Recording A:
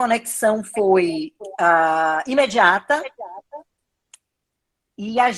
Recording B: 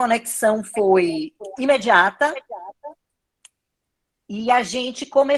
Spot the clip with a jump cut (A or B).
B